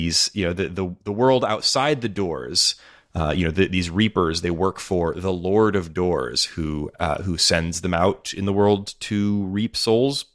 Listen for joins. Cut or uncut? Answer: uncut